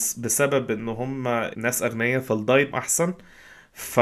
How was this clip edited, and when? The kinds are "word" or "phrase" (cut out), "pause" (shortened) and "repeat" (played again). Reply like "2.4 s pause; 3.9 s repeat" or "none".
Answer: 1.5 s word; 2.7 s word